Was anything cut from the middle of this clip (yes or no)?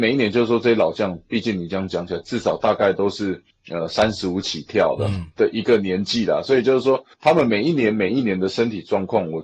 yes